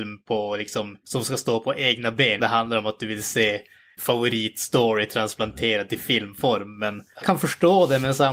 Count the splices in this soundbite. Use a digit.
4